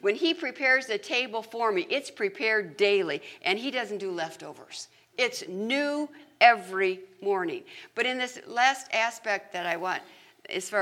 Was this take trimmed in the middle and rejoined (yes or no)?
no